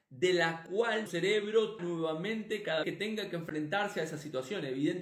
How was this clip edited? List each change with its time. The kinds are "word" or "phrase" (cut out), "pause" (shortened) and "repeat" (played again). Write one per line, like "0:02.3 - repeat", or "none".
0:01.1 - word
0:01.8 - word
0:02.8 - word